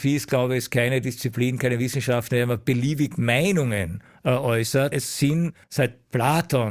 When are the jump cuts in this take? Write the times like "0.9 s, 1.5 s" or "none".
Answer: 4.9 s, 5.6 s

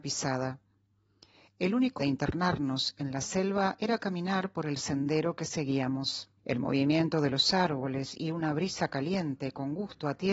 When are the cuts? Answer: 2.0 s, 6.4 s

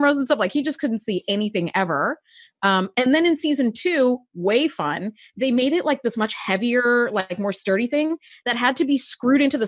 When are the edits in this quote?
none

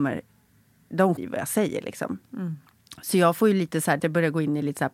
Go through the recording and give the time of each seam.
1.2 s, 4.0 s

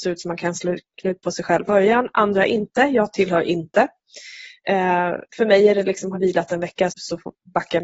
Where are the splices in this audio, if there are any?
1.7 s, 5.3 s, 6.1 s, 6.9 s

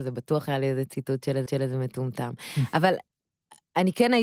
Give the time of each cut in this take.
1.5 s

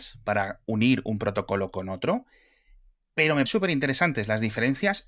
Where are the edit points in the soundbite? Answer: 3.5 s

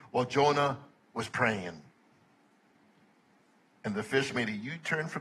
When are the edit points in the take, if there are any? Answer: none

